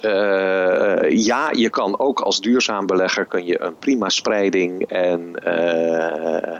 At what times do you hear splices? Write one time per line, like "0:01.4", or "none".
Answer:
none